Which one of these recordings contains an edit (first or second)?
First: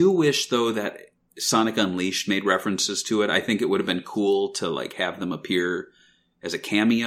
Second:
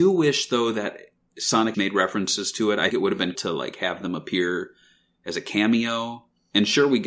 second